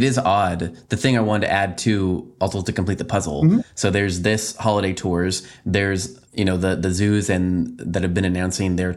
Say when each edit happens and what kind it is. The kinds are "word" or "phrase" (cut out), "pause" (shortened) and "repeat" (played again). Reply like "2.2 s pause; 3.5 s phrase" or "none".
6.3 s pause